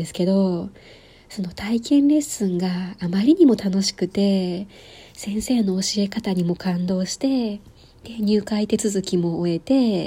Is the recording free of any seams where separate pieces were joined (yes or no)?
yes